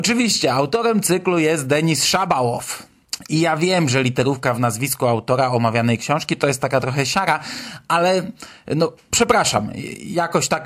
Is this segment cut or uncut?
uncut